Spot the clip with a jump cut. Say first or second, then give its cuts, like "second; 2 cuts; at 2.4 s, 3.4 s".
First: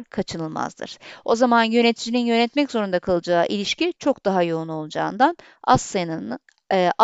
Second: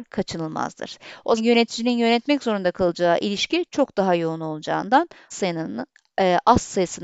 second; 2 cuts; at 1.4 s, 5.3 s